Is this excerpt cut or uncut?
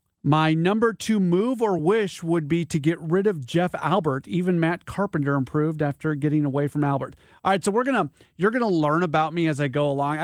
uncut